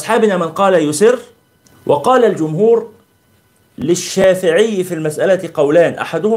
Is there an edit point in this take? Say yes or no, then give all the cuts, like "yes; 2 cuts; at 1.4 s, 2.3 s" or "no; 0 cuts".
yes; 1 cut; at 1.6 s